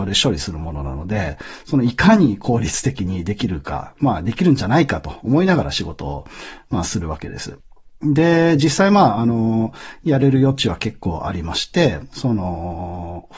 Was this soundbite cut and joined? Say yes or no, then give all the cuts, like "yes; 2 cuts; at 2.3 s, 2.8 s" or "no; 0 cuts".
no; 0 cuts